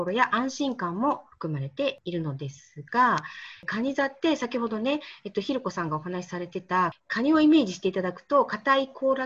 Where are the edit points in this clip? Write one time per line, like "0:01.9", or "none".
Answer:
0:07.0